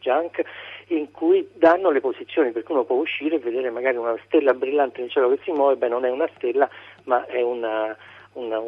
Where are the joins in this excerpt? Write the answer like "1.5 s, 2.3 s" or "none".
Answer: none